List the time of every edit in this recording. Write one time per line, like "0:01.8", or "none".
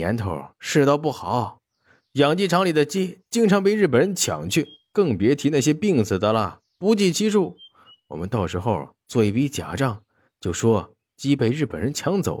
none